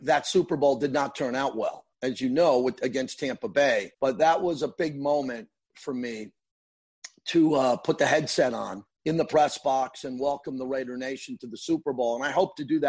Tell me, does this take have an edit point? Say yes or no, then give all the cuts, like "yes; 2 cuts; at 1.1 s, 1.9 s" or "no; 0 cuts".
yes; 3 cuts; at 1.9 s, 3.9 s, 8.9 s